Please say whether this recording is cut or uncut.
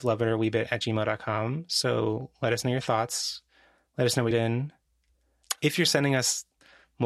cut